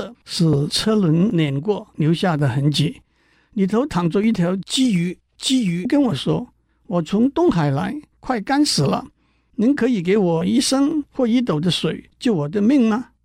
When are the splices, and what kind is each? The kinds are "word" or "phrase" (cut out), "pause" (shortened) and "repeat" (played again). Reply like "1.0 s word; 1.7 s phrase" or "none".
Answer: 5.3 s pause